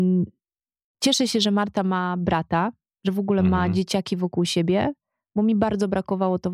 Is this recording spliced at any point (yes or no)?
no